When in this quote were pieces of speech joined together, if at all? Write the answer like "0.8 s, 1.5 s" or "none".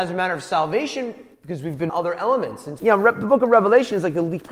1.3 s, 1.9 s, 2.8 s